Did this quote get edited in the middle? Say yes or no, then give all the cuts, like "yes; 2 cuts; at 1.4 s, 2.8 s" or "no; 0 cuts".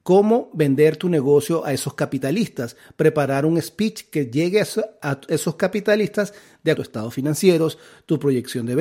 yes; 1 cut; at 6.7 s